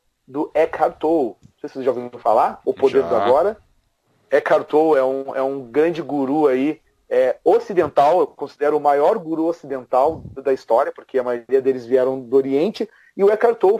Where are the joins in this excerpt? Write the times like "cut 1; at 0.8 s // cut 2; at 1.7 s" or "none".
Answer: none